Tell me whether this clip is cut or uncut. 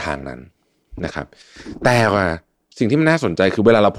uncut